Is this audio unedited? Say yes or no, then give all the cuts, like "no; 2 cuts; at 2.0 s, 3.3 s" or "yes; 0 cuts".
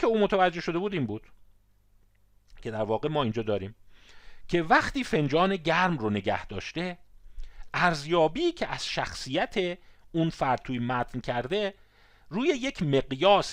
yes; 0 cuts